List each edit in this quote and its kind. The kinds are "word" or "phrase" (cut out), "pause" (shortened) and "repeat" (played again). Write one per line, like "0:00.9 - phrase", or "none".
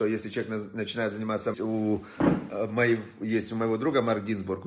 0:01.5 - phrase